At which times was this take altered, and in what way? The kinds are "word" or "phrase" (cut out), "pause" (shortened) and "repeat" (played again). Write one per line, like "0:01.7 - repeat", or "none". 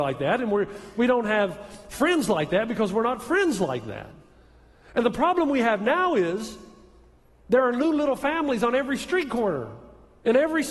none